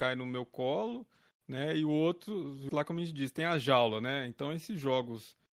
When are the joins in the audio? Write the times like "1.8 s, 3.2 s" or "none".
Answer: 2.7 s